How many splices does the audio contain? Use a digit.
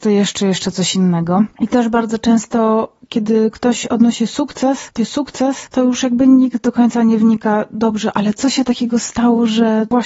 1